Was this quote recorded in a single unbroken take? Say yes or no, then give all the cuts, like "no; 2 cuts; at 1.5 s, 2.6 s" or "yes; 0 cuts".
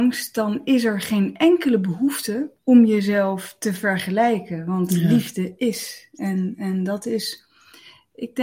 no; 1 cut; at 2.6 s